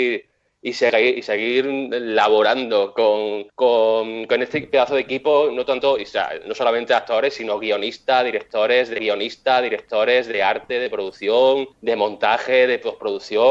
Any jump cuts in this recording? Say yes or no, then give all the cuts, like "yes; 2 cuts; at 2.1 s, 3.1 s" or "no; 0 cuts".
yes; 3 cuts; at 3.5 s, 9.0 s, 11.7 s